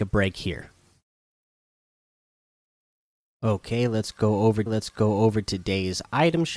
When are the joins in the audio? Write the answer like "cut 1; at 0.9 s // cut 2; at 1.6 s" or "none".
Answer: cut 1; at 4.7 s